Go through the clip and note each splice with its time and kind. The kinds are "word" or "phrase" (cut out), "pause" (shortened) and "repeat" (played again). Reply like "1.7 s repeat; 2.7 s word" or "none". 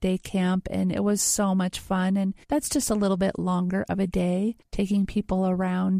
2.4 s pause